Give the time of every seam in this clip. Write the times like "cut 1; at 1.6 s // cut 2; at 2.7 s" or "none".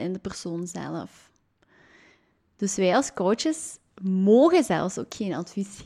none